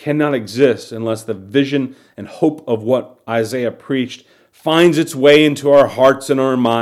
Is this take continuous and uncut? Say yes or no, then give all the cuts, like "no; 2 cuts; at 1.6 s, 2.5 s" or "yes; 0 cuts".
yes; 0 cuts